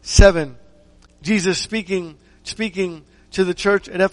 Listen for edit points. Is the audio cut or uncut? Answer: cut